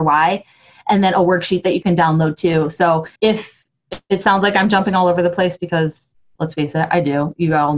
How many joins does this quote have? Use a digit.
1